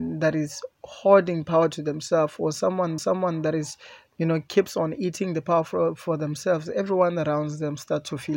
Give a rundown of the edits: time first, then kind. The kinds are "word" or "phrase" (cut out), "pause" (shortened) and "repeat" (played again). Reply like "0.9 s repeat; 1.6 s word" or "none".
3.0 s repeat